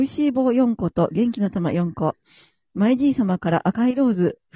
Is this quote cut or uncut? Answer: uncut